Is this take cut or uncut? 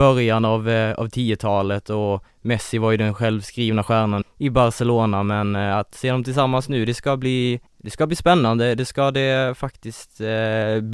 cut